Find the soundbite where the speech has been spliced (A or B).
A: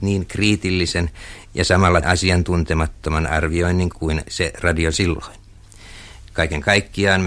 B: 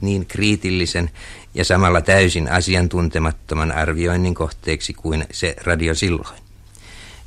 A